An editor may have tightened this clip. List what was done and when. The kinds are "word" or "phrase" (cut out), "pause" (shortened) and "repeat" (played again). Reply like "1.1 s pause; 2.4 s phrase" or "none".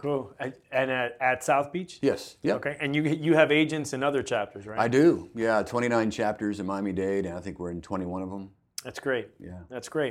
none